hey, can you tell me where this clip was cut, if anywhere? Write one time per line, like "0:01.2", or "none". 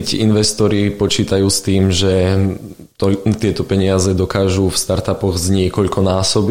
none